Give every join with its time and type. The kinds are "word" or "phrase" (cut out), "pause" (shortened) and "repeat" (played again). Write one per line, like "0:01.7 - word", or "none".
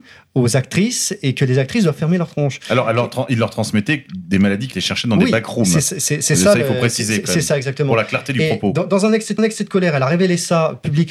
0:04.7 - phrase
0:09.4 - repeat